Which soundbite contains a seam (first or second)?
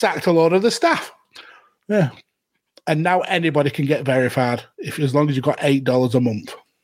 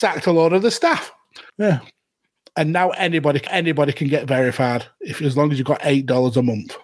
second